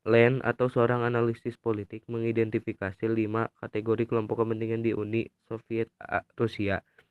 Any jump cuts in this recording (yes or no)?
yes